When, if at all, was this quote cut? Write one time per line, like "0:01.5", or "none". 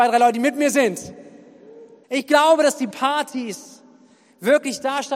0:02.0
0:02.9